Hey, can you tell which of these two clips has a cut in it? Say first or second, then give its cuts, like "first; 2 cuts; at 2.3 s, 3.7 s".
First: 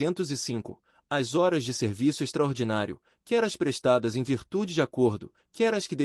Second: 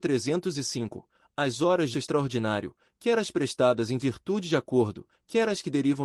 second; 1 cut; at 1.9 s